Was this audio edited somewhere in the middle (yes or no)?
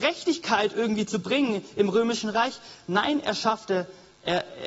no